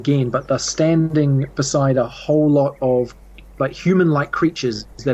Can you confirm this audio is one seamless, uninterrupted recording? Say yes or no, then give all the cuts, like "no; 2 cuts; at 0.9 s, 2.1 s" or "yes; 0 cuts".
yes; 0 cuts